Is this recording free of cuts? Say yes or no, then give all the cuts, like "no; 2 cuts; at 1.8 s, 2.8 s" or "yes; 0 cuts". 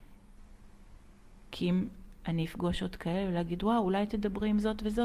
yes; 0 cuts